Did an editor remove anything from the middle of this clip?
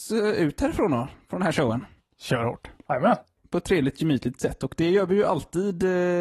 no; 0 cuts

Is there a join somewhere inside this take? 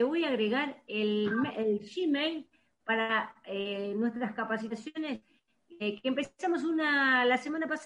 no; 0 cuts

